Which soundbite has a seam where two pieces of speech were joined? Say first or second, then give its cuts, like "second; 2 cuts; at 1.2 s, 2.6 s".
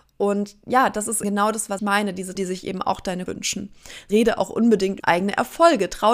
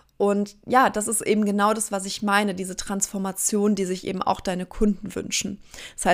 first; 6 cuts; at 1.2 s, 1.8 s, 2.4 s, 3.3 s, 4.1 s, 5.0 s